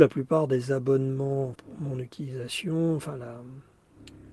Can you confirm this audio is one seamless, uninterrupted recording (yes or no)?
no